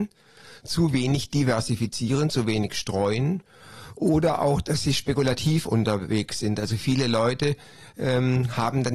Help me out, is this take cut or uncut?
uncut